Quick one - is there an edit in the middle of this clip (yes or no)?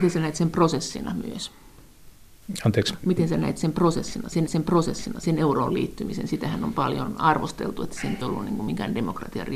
yes